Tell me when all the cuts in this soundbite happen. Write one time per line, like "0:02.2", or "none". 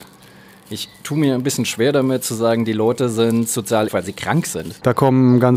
0:03.9

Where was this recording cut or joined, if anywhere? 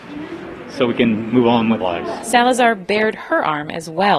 0:01.8

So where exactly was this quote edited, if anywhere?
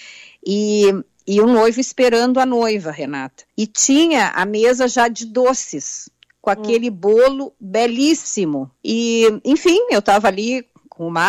0:03.5
0:08.8

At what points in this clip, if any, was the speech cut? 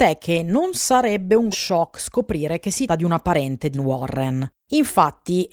0:01.5
0:02.9
0:03.7
0:04.6

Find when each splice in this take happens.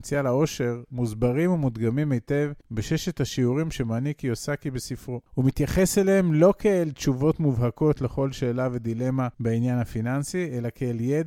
0:02.6
0:05.3
0:09.3

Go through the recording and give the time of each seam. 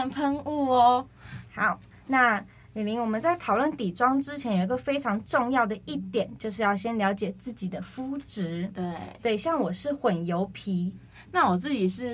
none

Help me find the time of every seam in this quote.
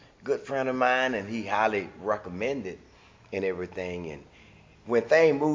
none

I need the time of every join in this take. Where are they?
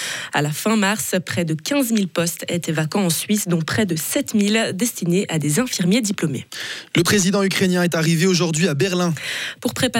none

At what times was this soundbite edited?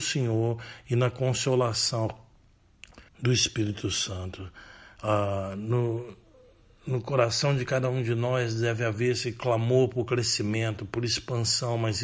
0:03.1

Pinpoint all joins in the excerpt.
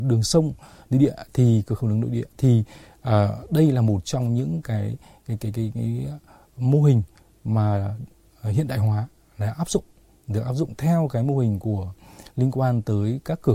none

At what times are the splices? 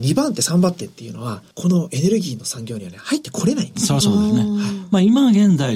0:01.5

